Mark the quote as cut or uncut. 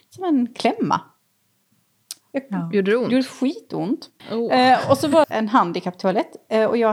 cut